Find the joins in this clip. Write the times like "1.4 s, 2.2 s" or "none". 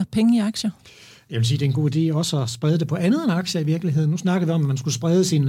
none